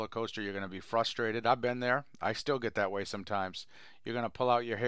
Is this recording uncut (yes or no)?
yes